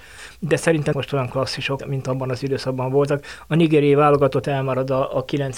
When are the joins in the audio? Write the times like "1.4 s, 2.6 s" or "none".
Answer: 0.9 s, 1.8 s, 4.4 s